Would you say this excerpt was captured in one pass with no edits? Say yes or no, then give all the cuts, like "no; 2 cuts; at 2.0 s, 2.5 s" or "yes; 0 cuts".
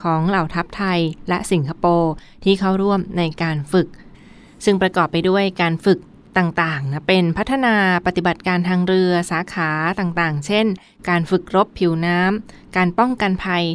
yes; 0 cuts